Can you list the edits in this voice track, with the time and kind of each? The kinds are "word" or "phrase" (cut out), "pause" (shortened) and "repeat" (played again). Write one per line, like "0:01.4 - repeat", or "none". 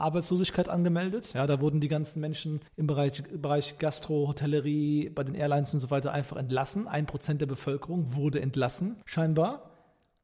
0:02.7 - pause
0:09.0 - pause